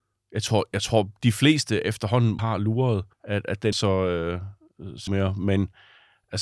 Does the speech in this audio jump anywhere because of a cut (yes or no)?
yes